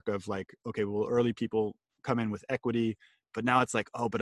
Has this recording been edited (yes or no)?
no